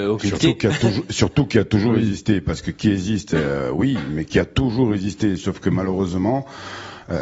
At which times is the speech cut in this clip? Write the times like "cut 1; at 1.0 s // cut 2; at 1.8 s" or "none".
none

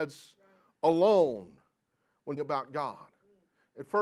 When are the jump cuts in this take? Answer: cut 1; at 2.4 s

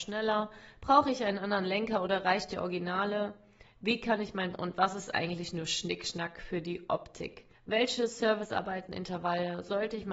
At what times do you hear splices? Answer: cut 1; at 4.5 s // cut 2; at 7.5 s

